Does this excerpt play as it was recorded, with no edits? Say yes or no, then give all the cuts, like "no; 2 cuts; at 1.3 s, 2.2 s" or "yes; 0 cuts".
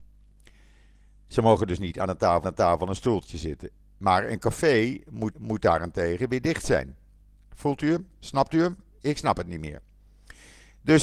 no; 2 cuts; at 2.4 s, 5.3 s